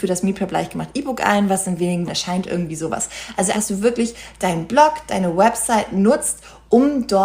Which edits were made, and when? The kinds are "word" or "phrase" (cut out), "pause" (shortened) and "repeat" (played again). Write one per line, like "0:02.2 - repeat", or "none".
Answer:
0:02.1 - word
0:03.5 - word